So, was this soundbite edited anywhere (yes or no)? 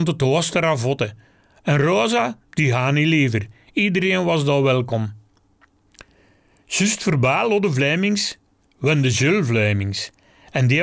no